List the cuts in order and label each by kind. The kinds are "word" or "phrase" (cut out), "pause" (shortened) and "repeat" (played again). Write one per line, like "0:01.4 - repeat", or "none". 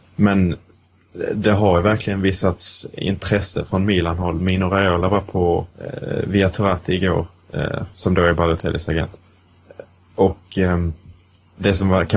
0:05.7 - pause

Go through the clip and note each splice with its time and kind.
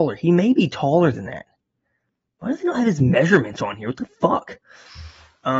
none

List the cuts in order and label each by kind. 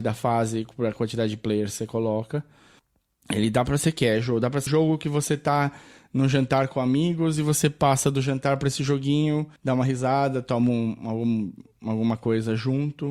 0:04.7 - word
0:09.6 - pause

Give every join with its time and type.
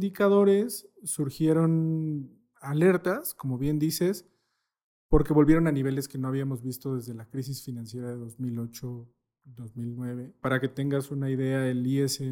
none

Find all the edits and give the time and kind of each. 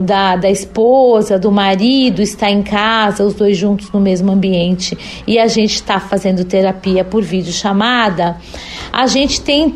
none

